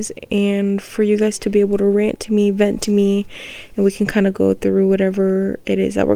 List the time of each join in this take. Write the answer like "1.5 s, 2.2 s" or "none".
none

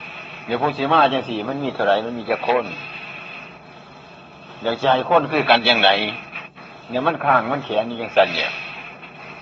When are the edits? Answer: 6.8 s

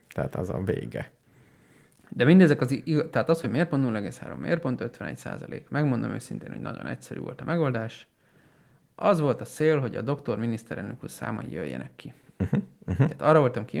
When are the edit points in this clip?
none

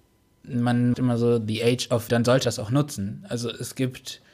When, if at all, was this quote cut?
0.9 s, 2.1 s, 2.4 s

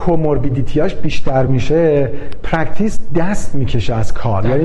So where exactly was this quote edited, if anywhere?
none

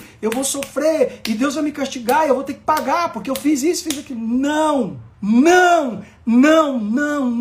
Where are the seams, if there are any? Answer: 5.1 s

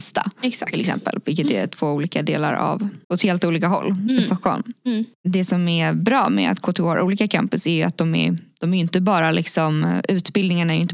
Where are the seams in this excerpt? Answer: 3.0 s

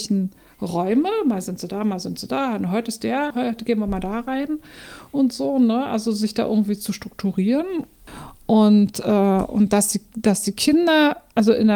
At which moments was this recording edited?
3.3 s

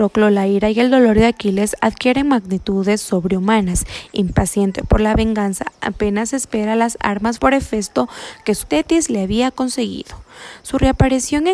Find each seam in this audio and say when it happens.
7.4 s, 8.6 s

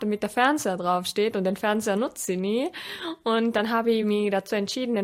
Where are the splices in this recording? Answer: none

